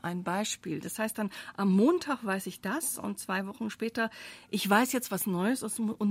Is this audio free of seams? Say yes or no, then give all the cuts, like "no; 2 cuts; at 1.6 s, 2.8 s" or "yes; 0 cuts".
yes; 0 cuts